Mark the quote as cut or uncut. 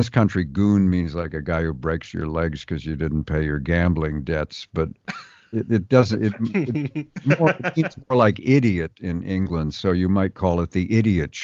uncut